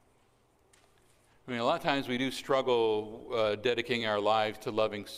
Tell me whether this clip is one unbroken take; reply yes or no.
yes